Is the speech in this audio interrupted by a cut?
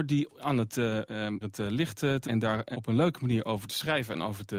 yes; 3 cuts; at 1.4 s, 2.2 s, 2.7 s

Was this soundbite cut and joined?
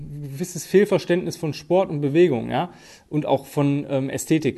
no; 0 cuts

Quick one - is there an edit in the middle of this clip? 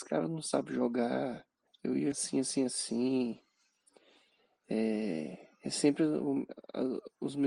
yes; 2 cuts; at 1.7 s, 2.1 s

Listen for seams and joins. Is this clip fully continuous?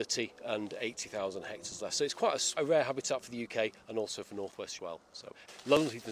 no; 2 cuts; at 2.6 s, 4.8 s

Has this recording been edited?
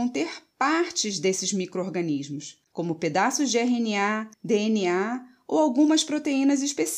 yes; 2 cuts; at 2.7 s, 4.3 s

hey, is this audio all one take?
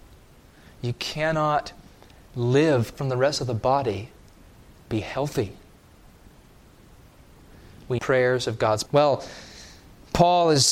no; 4 cuts; at 2.9 s, 4.9 s, 8.0 s, 8.9 s

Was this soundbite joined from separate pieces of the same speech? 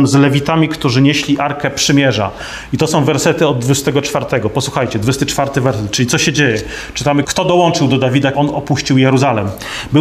yes; 2 cuts; at 7.2 s, 8.3 s

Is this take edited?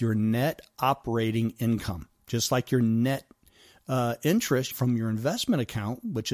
yes; 2 cuts; at 2.1 s, 4.7 s

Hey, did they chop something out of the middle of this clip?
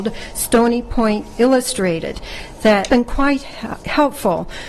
yes; 1 cut; at 2.9 s

